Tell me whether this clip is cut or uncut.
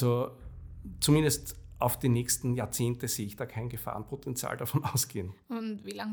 uncut